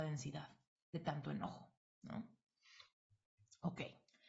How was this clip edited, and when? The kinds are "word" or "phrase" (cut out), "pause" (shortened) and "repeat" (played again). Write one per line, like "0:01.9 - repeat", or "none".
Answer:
none